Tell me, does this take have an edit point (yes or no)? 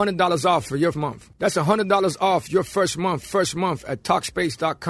yes